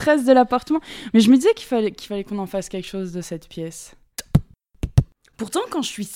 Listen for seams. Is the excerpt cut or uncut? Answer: uncut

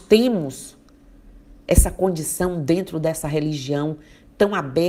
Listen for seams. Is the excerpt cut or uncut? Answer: uncut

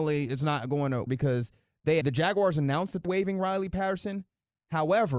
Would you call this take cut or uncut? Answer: cut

